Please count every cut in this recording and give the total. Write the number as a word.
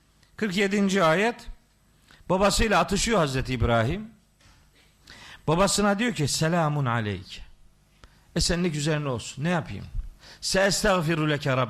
zero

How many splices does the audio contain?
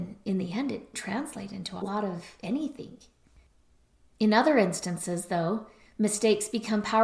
two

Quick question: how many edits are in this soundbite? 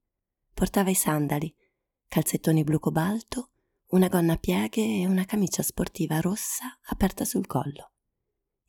zero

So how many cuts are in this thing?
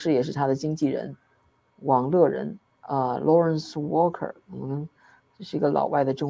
zero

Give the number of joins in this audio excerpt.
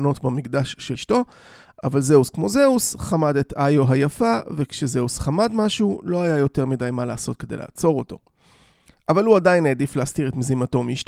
one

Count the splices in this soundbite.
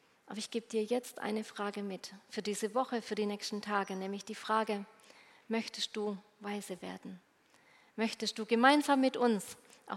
zero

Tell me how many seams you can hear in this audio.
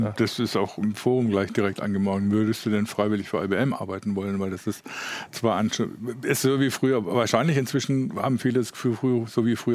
zero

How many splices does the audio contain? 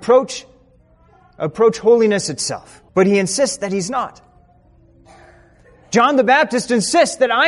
one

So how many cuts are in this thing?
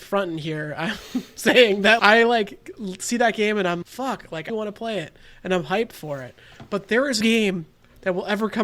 four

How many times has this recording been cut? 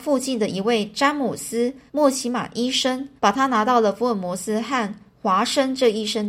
two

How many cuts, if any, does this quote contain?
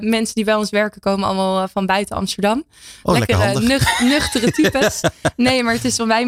zero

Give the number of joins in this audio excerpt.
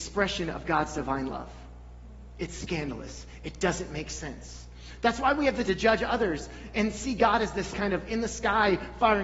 two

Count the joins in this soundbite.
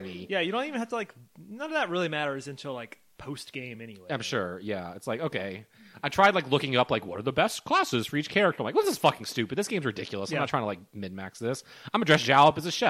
zero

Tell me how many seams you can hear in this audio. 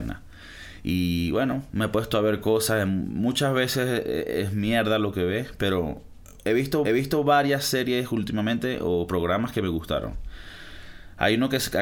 one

